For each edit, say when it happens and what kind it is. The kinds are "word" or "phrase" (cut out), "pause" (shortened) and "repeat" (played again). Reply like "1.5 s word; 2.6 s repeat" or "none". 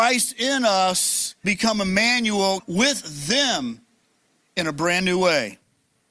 1.4 s word; 2.6 s word